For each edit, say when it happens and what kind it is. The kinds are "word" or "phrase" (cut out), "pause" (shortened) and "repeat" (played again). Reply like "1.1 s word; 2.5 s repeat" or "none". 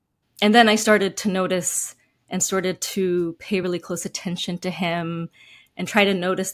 none